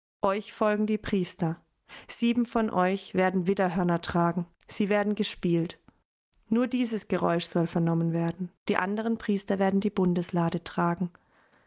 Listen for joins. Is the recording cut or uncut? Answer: cut